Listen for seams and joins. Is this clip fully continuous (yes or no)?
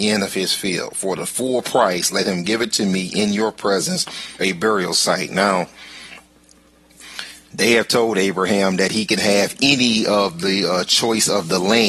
no